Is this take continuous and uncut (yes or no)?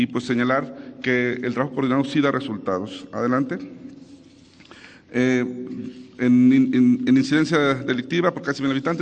yes